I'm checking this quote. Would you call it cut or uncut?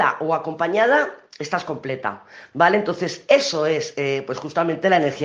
uncut